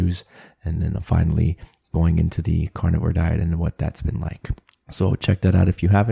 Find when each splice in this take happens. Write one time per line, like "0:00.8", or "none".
0:04.6